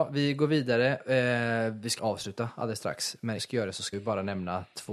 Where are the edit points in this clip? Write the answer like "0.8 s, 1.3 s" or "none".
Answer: 2.0 s, 3.4 s, 3.9 s